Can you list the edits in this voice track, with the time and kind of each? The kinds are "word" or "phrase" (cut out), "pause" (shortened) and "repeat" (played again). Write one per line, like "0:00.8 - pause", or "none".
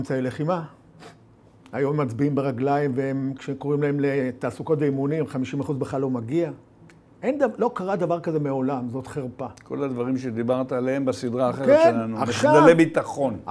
none